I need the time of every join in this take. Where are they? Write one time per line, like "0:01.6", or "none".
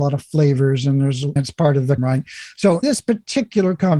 0:01.4
0:02.0
0:02.8